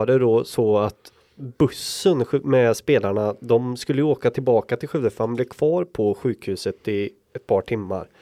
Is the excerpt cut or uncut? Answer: uncut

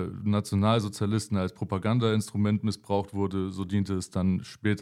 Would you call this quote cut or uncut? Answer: uncut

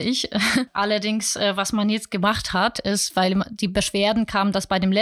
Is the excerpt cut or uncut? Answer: uncut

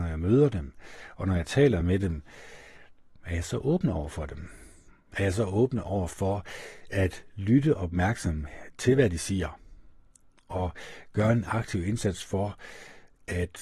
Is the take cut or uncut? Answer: uncut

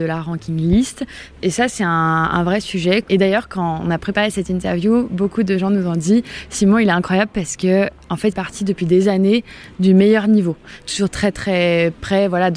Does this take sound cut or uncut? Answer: cut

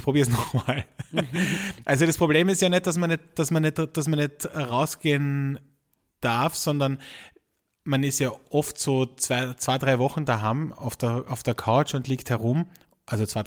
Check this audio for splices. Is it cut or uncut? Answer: uncut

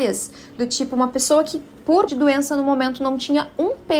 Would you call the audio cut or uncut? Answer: cut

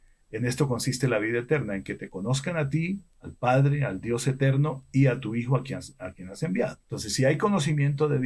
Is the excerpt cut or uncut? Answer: cut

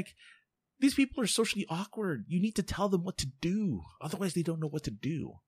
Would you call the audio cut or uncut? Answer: uncut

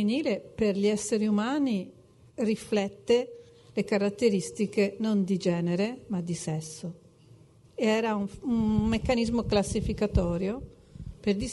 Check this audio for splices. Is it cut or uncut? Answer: uncut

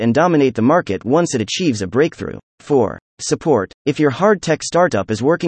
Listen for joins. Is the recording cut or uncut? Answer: cut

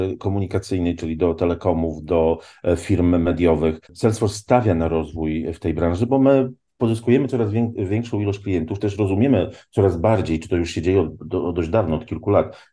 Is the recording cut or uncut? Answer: cut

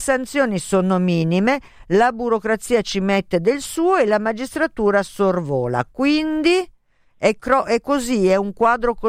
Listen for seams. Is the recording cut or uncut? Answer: uncut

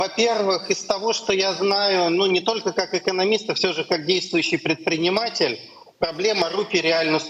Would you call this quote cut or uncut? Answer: uncut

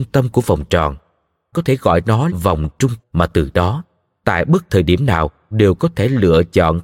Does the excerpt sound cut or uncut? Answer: cut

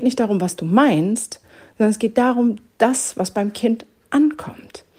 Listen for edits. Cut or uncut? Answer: uncut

